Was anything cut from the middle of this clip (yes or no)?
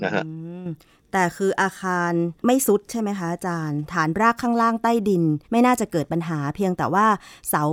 yes